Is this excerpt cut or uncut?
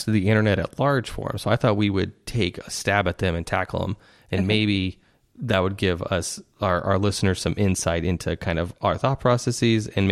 uncut